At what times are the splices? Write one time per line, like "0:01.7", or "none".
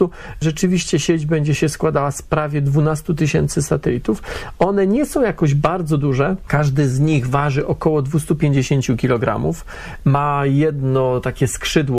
none